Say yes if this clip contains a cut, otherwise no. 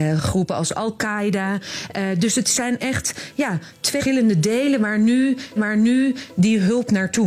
yes